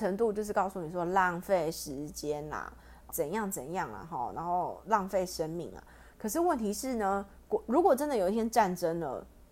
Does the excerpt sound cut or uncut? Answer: cut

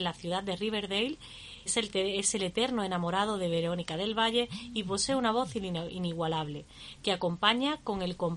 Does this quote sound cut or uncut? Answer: cut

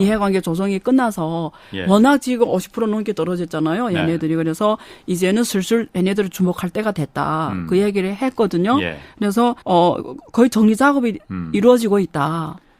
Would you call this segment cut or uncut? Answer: cut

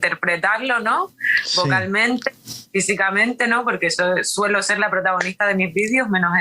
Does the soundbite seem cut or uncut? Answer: uncut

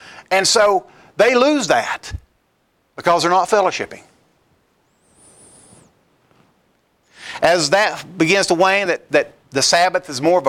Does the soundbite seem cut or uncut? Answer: uncut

